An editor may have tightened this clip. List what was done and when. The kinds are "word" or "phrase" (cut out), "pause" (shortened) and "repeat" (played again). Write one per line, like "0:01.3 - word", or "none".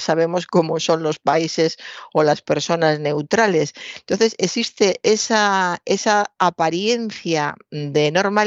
none